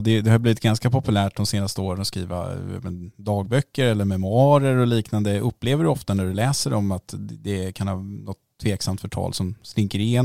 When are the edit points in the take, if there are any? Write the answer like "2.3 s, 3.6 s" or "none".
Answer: none